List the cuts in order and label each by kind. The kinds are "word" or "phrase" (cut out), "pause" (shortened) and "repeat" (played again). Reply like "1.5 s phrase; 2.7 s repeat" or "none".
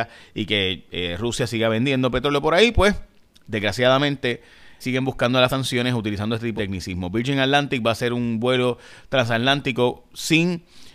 4.8 s word; 5.5 s phrase; 6.6 s phrase